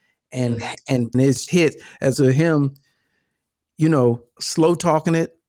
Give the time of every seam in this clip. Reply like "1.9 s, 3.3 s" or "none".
1.1 s, 1.5 s, 2.1 s, 4.4 s